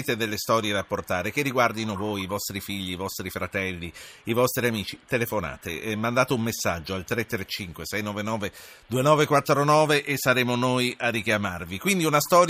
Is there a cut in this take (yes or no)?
no